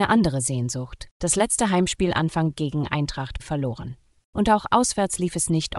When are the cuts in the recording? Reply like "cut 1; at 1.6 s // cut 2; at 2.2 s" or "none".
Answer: cut 1; at 2.5 s // cut 2; at 3.4 s